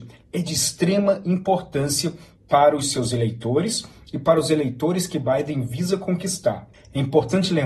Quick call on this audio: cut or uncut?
uncut